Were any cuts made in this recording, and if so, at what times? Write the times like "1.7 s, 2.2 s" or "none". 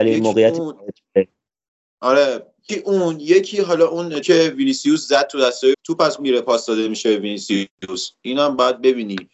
2.7 s, 4.2 s, 5.7 s, 6.2 s